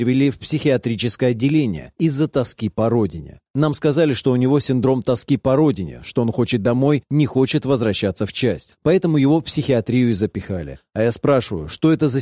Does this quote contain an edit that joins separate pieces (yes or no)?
no